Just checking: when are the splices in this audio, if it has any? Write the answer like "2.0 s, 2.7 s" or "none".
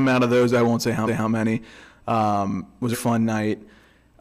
1.1 s, 2.9 s